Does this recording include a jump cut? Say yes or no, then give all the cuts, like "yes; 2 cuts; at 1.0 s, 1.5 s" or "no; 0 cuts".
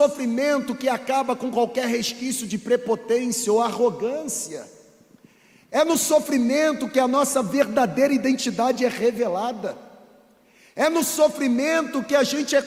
no; 0 cuts